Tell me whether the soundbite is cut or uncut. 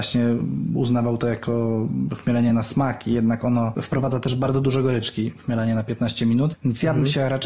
uncut